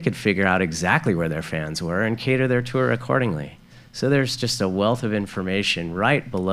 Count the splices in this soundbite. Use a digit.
0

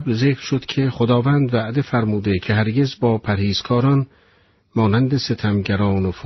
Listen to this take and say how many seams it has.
0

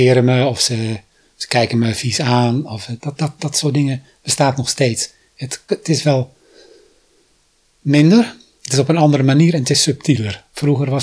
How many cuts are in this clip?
2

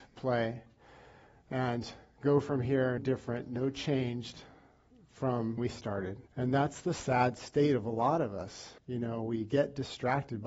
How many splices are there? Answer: 4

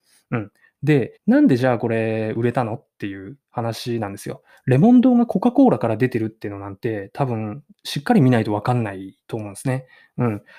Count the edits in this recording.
2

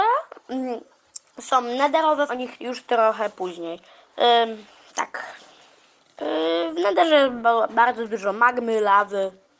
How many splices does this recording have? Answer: 2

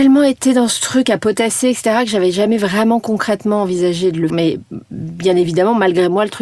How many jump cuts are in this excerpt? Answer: 1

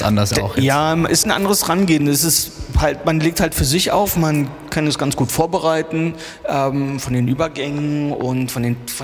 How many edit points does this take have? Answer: 1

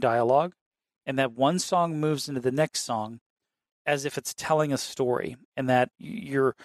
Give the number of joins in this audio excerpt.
0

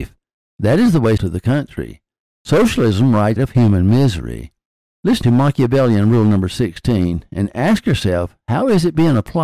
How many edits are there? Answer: 3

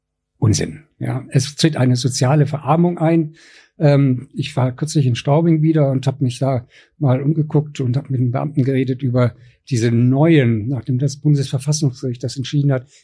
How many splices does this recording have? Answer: 0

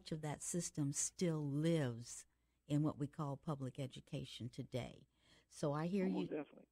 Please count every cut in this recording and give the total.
0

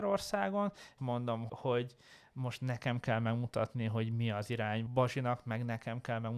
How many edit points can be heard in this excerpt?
3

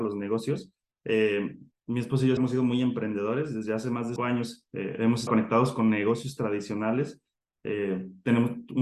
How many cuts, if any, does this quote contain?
3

